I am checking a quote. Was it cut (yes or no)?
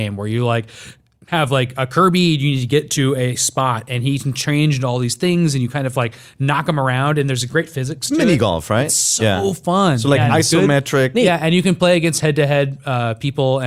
no